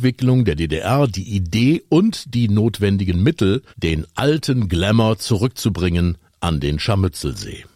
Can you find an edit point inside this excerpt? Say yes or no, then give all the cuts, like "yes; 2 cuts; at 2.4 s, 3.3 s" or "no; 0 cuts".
yes; 1 cut; at 3.7 s